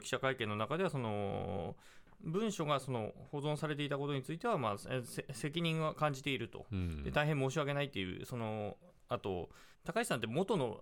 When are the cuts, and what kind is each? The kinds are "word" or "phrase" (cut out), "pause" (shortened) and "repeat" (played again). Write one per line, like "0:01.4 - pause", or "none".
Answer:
0:09.7 - pause